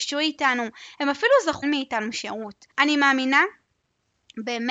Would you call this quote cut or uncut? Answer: cut